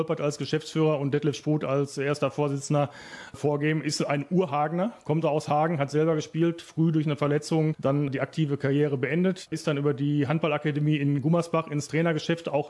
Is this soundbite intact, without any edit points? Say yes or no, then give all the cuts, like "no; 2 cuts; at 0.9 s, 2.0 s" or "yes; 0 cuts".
no; 1 cut; at 5.2 s